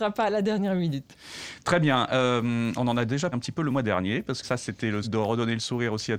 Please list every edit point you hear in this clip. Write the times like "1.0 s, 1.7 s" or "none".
3.3 s, 4.4 s, 5.0 s